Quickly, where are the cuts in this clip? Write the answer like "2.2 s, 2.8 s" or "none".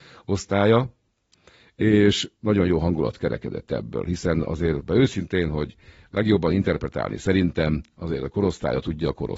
4.8 s